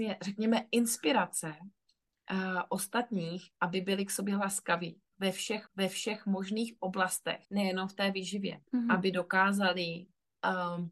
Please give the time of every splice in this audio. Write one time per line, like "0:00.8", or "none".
0:05.7
0:07.4
0:08.7